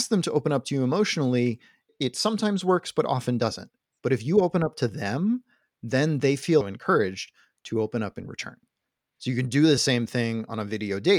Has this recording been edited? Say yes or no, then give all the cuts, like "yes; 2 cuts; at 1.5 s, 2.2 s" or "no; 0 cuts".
no; 0 cuts